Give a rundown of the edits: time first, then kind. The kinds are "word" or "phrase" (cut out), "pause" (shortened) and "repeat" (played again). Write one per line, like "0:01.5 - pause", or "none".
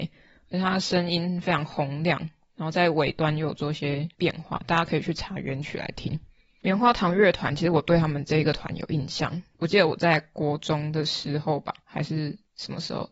none